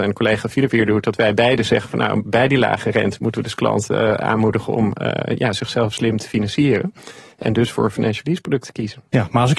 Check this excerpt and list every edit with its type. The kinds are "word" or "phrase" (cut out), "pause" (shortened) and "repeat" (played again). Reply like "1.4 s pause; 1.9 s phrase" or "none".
none